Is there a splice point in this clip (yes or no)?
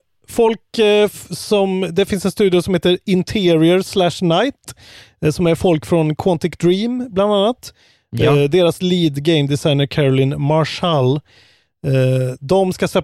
no